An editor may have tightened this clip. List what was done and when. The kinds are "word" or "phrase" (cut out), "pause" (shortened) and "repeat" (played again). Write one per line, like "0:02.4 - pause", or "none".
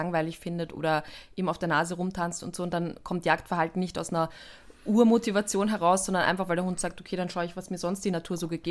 none